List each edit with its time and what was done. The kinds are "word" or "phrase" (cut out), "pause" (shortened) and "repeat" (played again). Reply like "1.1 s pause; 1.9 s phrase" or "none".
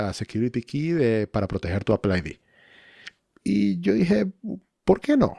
3.2 s pause